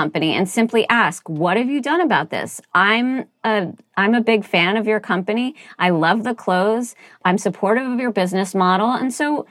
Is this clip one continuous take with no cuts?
yes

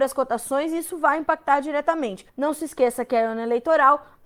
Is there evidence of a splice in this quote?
yes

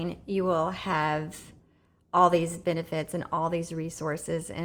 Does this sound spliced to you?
no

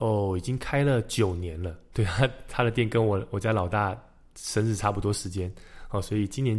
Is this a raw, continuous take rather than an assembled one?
yes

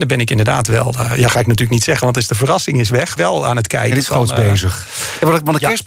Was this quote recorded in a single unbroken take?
no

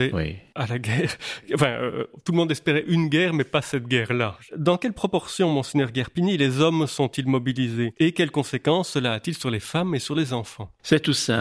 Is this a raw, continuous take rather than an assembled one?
yes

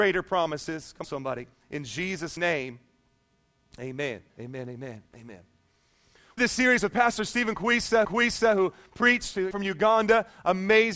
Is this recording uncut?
no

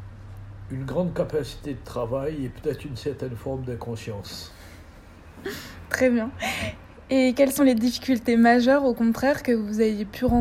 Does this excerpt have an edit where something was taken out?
no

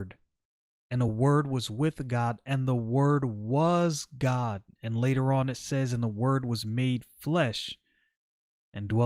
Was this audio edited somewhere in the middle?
no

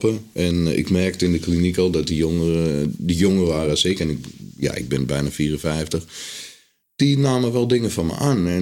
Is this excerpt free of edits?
yes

